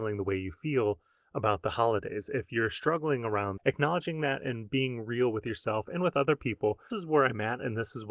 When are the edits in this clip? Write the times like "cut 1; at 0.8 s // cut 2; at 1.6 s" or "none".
cut 1; at 3.6 s // cut 2; at 6.9 s